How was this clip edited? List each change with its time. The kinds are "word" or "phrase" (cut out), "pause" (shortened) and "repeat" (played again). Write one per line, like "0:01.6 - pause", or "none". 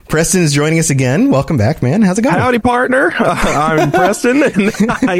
none